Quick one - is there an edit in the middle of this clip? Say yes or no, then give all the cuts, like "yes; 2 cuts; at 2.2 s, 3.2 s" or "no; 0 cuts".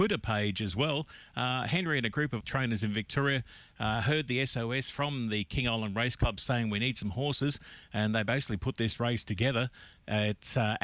yes; 1 cut; at 2.4 s